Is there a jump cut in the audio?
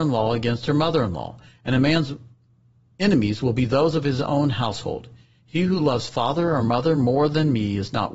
no; 0 cuts

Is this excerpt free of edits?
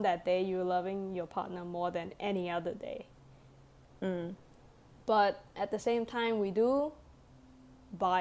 yes; 0 cuts

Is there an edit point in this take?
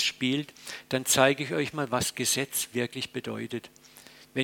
no; 0 cuts

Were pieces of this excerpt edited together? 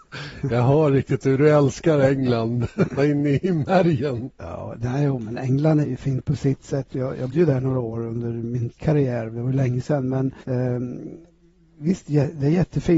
yes; 5 cuts; at 3.0 s, 5.8 s, 7.3 s, 8.8 s, 10.4 s

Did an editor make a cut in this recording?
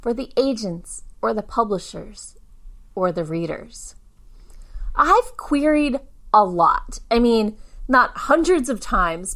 no; 0 cuts

